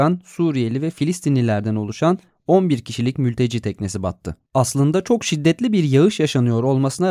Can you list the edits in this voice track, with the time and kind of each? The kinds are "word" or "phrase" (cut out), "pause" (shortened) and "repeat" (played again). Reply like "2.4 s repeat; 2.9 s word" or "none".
4.5 s pause